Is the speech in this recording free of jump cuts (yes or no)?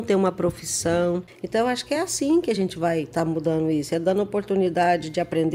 yes